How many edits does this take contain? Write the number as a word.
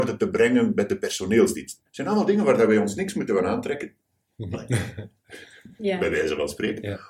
one